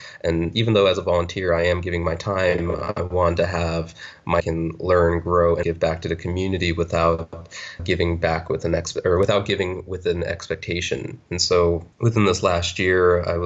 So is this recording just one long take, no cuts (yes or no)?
no